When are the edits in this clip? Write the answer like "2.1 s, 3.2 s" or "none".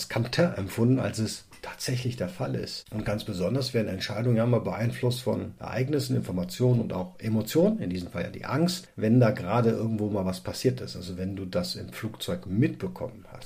none